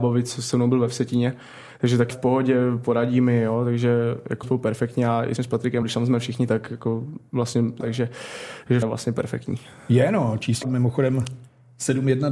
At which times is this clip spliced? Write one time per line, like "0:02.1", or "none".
0:02.1
0:04.4
0:05.4
0:05.8
0:06.5
0:07.8
0:08.8
0:10.6